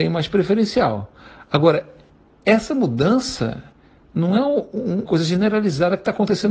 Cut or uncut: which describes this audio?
cut